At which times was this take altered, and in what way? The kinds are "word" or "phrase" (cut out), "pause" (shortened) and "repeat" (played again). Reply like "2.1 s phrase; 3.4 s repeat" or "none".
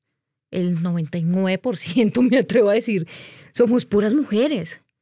none